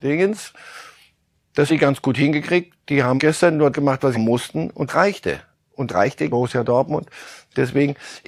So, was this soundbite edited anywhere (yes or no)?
yes